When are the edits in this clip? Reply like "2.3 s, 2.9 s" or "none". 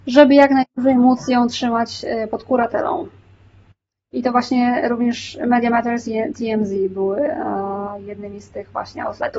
6.0 s